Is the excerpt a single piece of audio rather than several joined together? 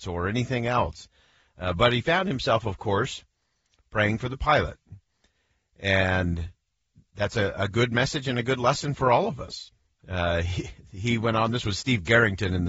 yes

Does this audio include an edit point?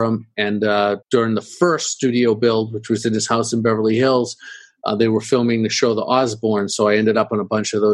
yes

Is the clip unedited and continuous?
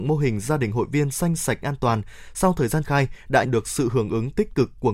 no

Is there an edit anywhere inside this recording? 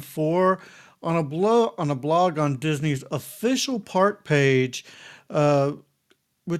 no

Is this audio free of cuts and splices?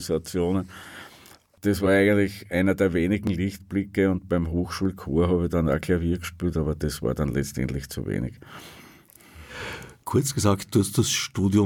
yes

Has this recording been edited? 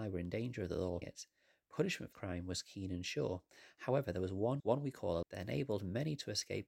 yes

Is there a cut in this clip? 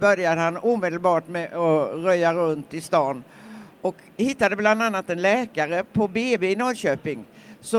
no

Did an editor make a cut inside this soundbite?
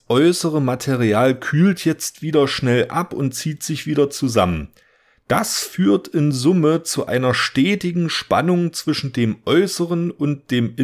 no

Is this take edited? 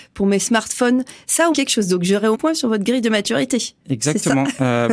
yes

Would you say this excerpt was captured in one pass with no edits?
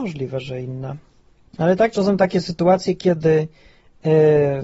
no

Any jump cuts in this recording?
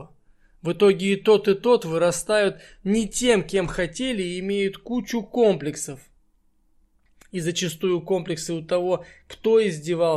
no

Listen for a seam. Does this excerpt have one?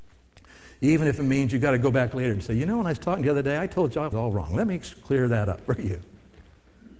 yes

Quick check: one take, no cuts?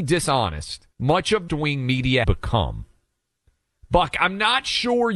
no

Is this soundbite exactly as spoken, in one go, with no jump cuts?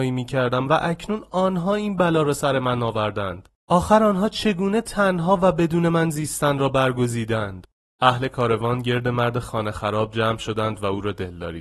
yes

